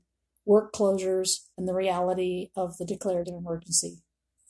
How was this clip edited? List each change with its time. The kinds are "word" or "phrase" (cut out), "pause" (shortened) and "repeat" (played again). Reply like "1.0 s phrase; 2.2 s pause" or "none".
1.5 s pause; 3.2 s word